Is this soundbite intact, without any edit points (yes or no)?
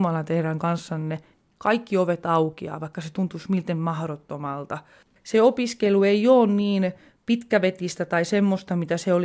yes